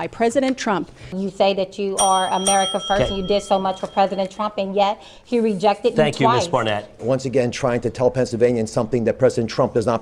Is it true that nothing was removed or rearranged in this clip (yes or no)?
yes